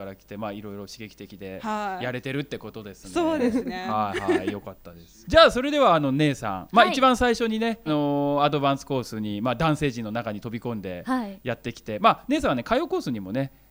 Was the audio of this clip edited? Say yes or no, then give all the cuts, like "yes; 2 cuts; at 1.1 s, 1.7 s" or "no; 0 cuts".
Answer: yes; 2 cuts; at 5.2 s, 7.9 s